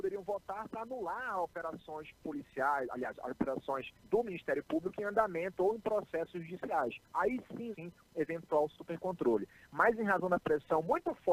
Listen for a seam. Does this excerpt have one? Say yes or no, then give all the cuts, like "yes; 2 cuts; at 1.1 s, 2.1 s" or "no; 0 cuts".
yes; 3 cuts; at 4.0 s, 7.0 s, 7.7 s